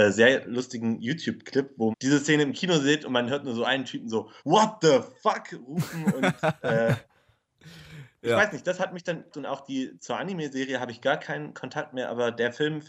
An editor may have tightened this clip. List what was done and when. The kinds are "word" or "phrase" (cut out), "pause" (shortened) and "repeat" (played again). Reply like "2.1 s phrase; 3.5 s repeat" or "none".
1.9 s word; 4.4 s pause; 9.3 s phrase